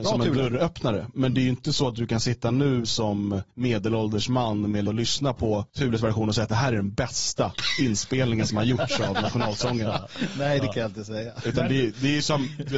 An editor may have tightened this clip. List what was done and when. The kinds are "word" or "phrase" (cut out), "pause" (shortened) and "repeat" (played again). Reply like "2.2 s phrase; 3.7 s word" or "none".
3.5 s pause; 4.9 s phrase; 5.7 s pause